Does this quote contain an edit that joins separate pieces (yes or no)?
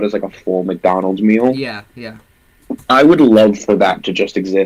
no